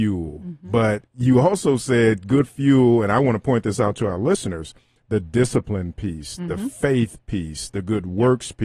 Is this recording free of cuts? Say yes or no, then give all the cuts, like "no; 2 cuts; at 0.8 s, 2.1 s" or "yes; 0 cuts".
no; 1 cut; at 1.1 s